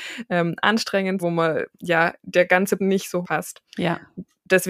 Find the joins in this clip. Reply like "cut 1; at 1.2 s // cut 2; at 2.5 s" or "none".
cut 1; at 1.2 s // cut 2; at 1.7 s // cut 3; at 2.8 s // cut 4; at 3.2 s // cut 5; at 3.7 s